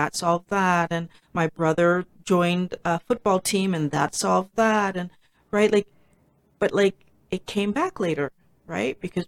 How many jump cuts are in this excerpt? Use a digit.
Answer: 0